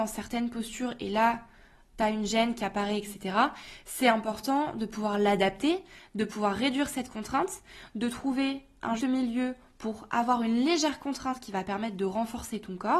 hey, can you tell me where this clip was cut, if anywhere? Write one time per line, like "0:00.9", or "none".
0:09.0